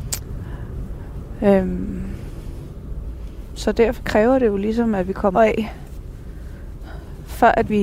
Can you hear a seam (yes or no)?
yes